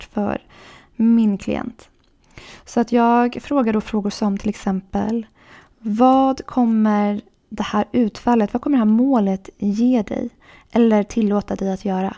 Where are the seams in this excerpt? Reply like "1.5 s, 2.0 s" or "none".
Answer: none